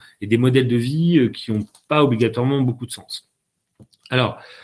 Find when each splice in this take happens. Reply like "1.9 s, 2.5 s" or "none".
none